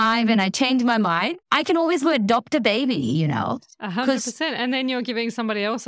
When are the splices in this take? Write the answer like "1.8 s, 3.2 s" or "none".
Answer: 1.4 s